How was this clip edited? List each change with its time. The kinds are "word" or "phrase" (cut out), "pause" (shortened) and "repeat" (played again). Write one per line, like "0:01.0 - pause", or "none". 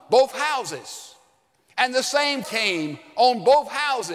0:02.4 - word